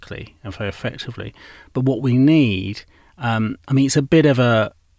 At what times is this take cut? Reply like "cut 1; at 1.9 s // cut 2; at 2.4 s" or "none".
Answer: none